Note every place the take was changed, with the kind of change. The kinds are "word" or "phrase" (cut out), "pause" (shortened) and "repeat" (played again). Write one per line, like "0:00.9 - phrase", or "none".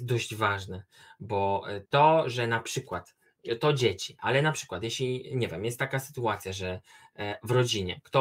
0:01.9 - pause

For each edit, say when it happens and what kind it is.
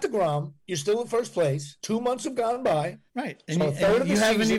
0:01.8 - pause
0:03.1 - pause

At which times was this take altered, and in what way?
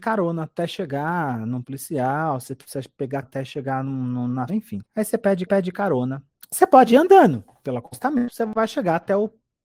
0:01.6 - word
0:03.2 - word
0:04.5 - phrase
0:04.9 - pause
0:05.5 - repeat

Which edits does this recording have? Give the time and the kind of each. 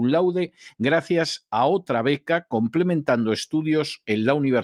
none

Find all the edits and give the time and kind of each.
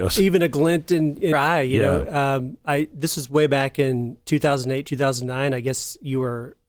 0:01.3 - word

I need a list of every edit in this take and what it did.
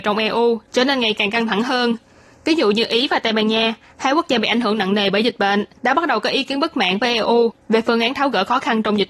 0:05.8 - pause

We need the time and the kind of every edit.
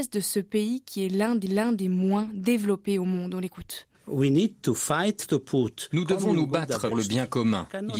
0:01.5 - repeat
0:03.9 - pause
0:06.9 - word

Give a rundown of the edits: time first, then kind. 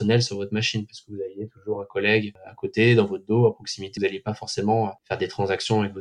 0:04.0 - word

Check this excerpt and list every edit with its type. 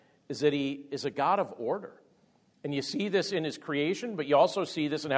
none

